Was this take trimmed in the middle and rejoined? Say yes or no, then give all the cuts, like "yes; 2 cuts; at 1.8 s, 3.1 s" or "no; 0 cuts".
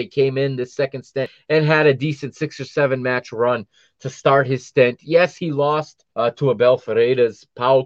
yes; 1 cut; at 6.1 s